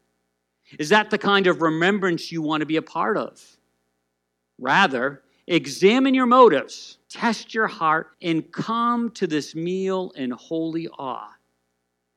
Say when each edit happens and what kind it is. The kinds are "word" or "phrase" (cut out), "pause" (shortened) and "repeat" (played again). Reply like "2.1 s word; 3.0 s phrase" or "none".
7.0 s pause; 8.1 s pause